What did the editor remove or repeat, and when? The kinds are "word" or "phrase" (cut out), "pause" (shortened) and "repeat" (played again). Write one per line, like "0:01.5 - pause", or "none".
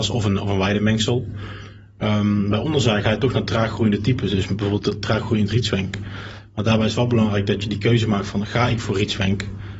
none